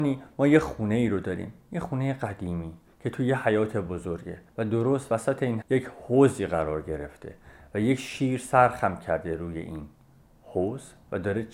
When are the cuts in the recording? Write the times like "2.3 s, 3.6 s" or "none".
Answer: 4.5 s, 5.6 s, 10.2 s